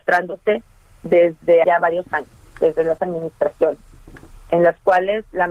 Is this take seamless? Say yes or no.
no